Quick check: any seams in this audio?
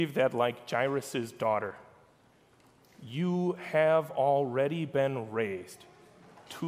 no; 0 cuts

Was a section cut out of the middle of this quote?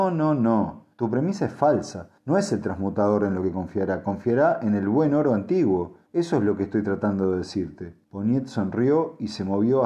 yes; 4 cuts; at 0.9 s, 2.2 s, 6.1 s, 8.0 s

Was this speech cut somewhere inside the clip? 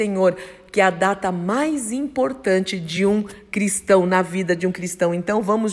no; 0 cuts

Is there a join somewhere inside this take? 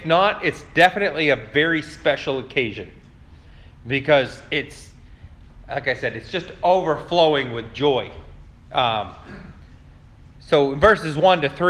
no; 0 cuts

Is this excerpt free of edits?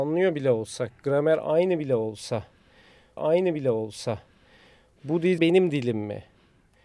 no; 2 cuts; at 3.2 s, 5.4 s

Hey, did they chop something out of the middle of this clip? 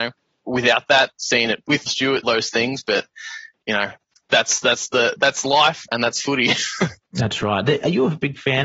yes; 2 cuts; at 1.9 s, 2.2 s

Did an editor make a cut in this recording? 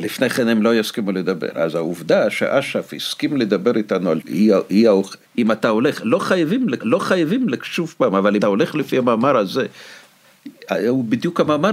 yes; 4 cuts; at 4.2 s, 5.3 s, 6.8 s, 8.4 s

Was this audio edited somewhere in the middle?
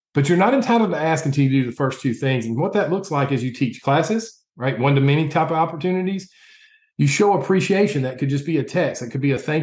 yes; 1 cut; at 4.5 s

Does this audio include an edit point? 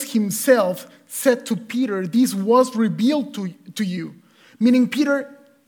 no; 0 cuts

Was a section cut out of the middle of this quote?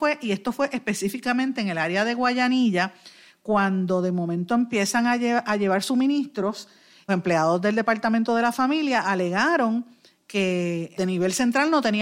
yes; 2 cuts; at 7.1 s, 11.0 s

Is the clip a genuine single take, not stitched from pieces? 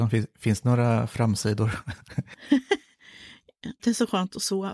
no; 1 cut; at 3.8 s

